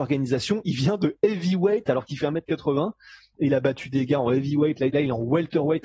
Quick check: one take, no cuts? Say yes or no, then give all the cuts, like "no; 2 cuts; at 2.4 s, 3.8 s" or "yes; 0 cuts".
no; 1 cut; at 4.9 s